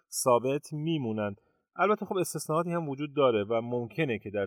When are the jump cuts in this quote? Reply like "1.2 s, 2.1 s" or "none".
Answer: none